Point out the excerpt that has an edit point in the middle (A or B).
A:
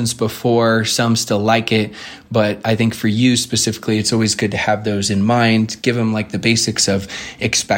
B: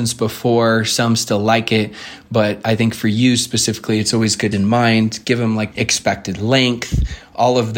B